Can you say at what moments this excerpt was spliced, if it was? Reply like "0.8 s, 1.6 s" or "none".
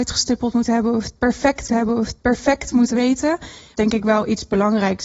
1.7 s, 3.8 s